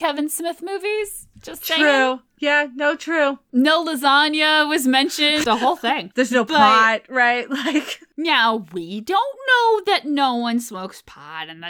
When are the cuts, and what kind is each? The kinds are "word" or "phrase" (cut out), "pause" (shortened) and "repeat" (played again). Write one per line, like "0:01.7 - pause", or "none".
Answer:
0:05.4 - word